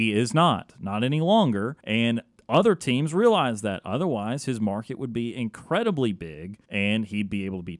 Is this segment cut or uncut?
cut